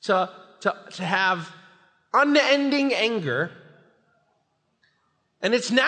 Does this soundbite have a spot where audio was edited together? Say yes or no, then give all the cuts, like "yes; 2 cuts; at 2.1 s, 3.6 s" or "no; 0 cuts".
no; 0 cuts